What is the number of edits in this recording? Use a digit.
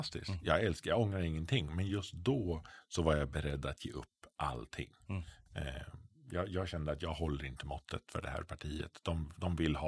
0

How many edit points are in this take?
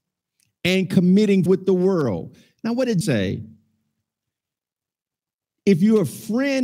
2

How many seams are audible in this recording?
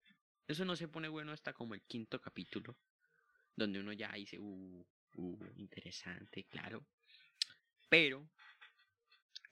0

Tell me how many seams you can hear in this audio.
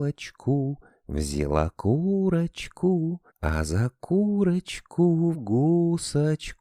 2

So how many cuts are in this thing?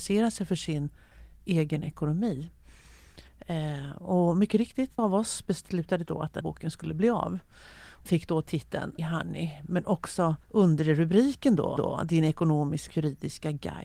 9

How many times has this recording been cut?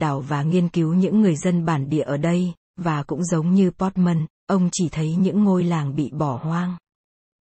0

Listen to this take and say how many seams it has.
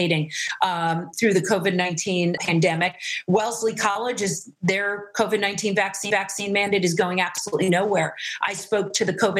3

